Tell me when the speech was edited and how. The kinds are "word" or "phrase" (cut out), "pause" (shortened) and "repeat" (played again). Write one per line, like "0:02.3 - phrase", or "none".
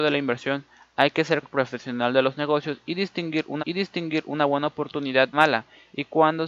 0:01.4 - word
0:03.6 - repeat
0:05.3 - phrase